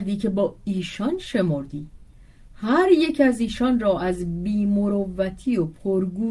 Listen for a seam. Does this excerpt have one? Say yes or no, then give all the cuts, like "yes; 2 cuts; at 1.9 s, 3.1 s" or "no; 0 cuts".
no; 0 cuts